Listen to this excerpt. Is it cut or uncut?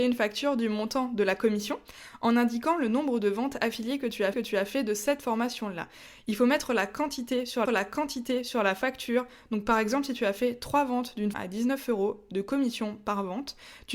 cut